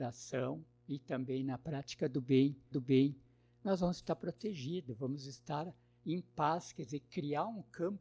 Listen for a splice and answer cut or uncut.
cut